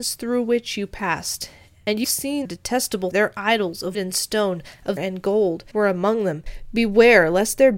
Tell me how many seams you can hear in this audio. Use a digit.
6